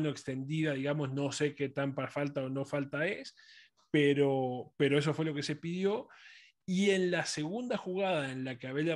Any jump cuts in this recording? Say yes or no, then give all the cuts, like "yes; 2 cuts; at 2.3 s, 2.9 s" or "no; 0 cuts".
no; 0 cuts